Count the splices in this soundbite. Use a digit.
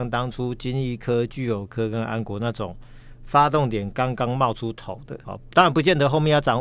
1